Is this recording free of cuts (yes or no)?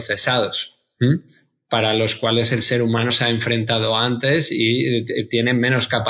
no